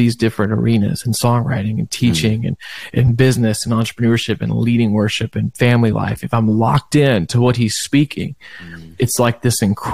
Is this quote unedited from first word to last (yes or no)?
yes